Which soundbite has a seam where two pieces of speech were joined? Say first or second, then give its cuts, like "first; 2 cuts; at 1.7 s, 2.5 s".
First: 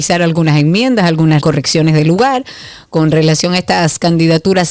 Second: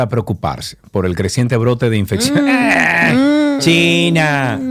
first; 1 cut; at 1.4 s